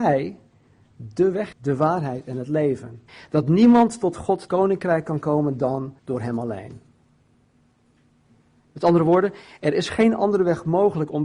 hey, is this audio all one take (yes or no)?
no